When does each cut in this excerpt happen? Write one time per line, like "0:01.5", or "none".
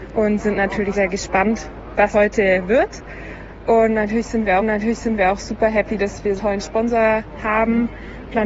0:00.9
0:02.1
0:04.6
0:06.4